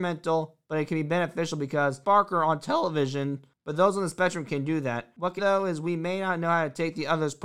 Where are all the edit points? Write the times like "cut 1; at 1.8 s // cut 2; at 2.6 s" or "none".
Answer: cut 1; at 2.0 s // cut 2; at 5.4 s